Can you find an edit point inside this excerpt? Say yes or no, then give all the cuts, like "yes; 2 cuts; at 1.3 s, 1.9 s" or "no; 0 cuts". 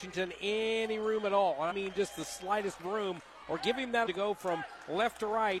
yes; 3 cuts; at 1.7 s, 2.8 s, 4.1 s